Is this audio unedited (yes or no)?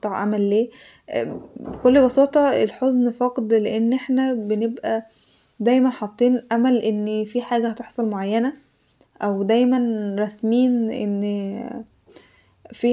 yes